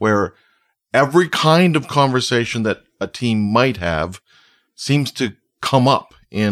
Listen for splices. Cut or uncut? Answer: uncut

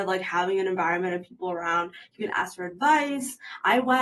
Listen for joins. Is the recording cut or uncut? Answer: uncut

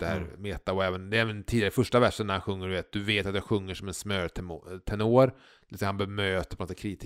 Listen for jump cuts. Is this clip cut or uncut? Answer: uncut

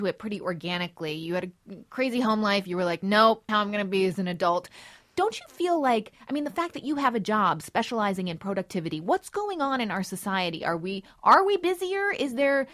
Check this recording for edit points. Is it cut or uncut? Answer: cut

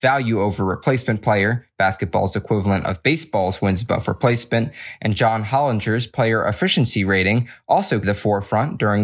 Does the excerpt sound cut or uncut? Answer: cut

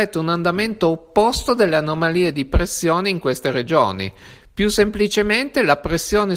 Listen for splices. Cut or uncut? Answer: uncut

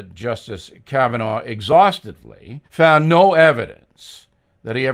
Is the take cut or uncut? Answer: cut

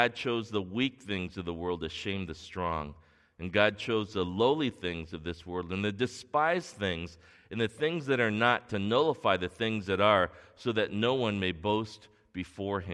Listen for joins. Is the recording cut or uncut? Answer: uncut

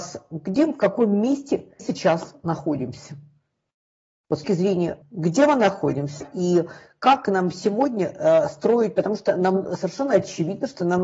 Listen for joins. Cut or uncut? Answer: cut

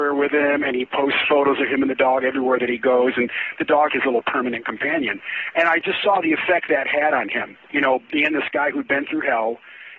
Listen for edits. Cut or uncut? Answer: cut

